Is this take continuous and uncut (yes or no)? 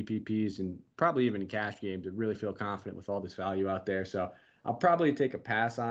yes